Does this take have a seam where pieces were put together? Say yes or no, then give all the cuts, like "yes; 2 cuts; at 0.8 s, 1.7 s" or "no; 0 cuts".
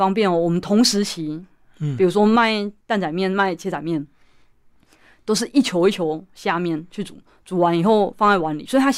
no; 0 cuts